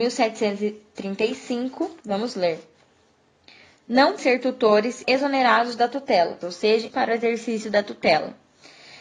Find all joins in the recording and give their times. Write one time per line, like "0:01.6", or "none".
0:02.0
0:04.2
0:05.0
0:06.4
0:06.9